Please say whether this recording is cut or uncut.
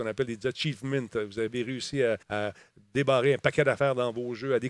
cut